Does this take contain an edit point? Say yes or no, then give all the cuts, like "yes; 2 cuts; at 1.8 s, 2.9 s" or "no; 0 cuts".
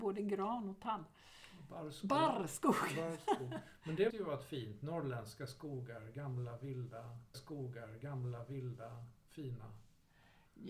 yes; 2 cuts; at 4.1 s, 7.3 s